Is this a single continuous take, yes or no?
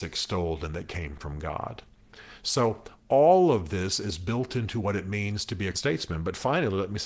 no